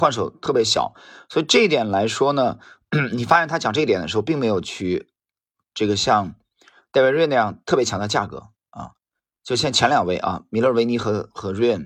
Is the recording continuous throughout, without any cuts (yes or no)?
yes